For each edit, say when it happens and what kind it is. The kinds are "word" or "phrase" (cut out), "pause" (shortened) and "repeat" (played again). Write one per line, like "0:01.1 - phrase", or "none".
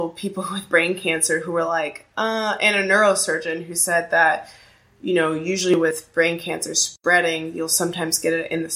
none